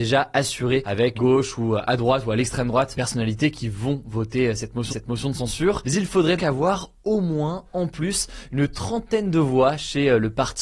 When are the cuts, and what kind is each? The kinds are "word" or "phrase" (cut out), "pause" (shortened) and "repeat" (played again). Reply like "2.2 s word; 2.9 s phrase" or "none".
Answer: 1.1 s word; 2.9 s phrase; 4.9 s repeat; 6.4 s word